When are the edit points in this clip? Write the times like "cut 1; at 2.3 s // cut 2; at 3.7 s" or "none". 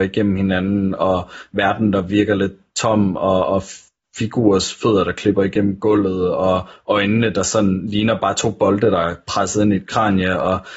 none